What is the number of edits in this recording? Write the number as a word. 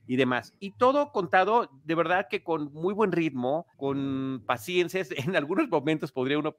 one